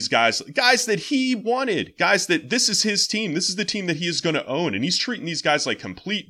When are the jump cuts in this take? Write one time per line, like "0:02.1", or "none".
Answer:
none